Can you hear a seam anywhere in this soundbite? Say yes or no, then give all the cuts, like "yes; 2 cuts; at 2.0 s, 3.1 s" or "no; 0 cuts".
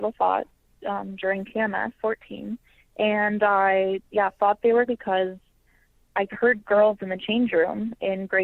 yes; 3 cuts; at 2.0 s, 4.9 s, 6.0 s